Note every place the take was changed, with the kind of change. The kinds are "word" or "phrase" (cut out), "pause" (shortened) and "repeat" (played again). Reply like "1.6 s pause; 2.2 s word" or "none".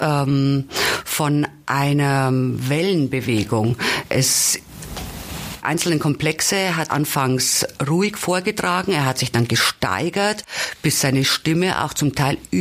5.6 s word; 6.9 s word